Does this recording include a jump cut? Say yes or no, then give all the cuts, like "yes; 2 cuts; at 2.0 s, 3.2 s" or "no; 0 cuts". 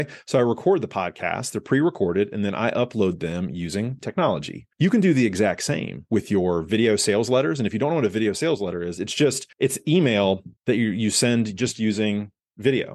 yes; 3 cuts; at 4.7 s, 9.5 s, 10.6 s